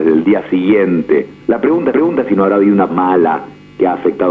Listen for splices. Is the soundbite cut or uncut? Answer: cut